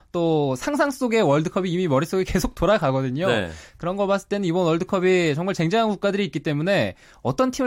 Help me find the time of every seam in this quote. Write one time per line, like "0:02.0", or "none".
none